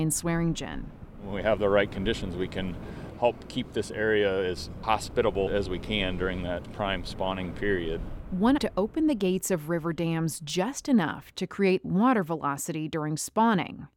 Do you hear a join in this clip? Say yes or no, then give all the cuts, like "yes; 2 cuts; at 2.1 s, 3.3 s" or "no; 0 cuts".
yes; 3 cuts; at 5.5 s, 8.6 s, 11.8 s